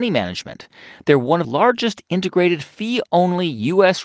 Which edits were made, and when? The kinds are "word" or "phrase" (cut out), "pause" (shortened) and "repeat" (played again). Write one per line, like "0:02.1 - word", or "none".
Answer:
0:01.4 - word